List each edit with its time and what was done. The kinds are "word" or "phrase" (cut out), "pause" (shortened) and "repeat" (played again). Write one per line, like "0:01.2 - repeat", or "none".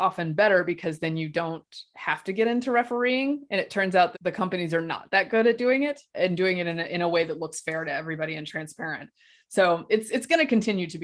0:04.1 - word
0:06.1 - word